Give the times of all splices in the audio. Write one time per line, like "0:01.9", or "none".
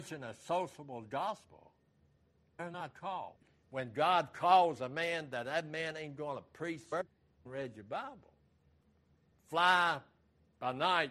none